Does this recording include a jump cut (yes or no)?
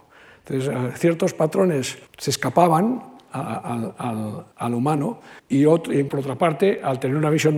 yes